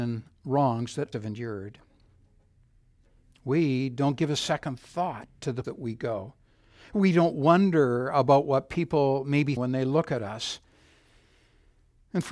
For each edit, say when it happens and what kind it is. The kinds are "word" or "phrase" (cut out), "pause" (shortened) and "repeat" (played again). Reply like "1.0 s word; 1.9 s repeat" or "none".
1.1 s word; 5.6 s word; 9.6 s word